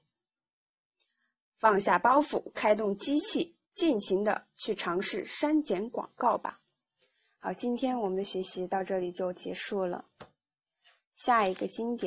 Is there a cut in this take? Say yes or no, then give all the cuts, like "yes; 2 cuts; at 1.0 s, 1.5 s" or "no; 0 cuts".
yes; 2 cuts; at 3.6 s, 6.8 s